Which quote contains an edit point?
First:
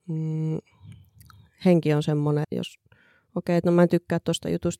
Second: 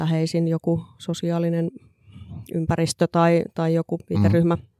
first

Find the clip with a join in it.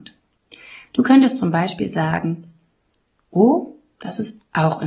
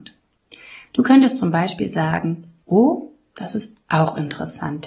second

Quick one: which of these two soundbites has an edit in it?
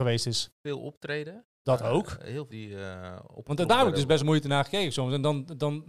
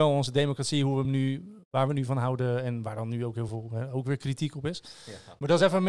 first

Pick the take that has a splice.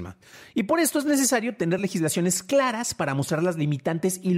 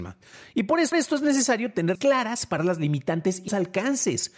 second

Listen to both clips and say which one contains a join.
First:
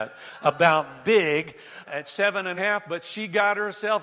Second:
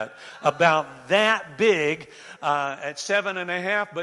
first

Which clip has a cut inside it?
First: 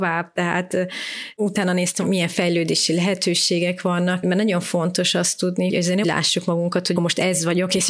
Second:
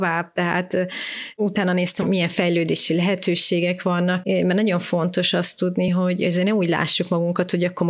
first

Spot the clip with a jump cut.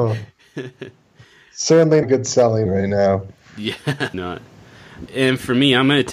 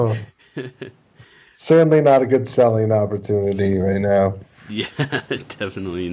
first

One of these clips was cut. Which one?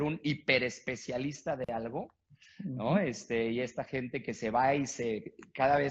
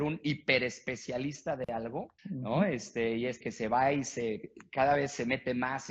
second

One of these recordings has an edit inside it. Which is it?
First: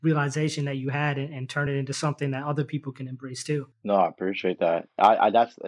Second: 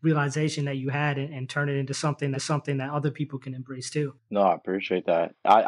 second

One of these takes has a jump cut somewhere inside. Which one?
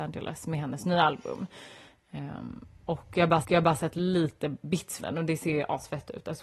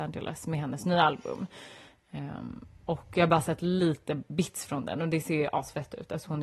first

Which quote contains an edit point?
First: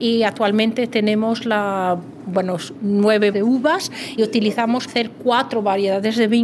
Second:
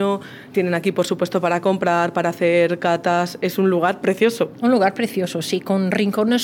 first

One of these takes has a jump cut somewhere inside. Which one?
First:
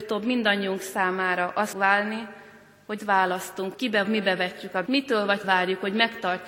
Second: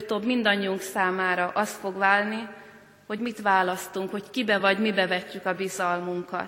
first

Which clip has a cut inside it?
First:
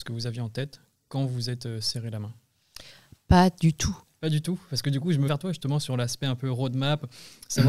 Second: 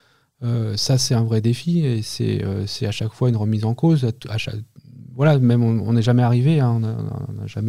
first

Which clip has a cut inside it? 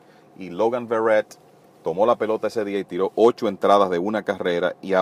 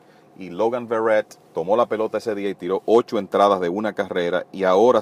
second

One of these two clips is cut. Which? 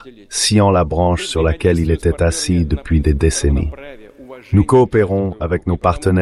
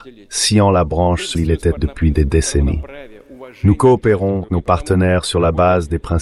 second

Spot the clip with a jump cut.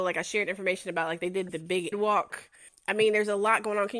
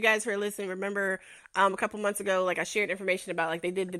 first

